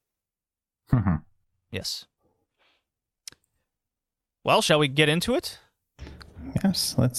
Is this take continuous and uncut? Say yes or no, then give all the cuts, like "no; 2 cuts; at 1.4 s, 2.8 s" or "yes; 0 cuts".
yes; 0 cuts